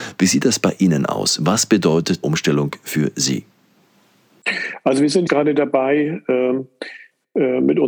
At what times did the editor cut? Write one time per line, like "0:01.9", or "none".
0:02.2
0:05.3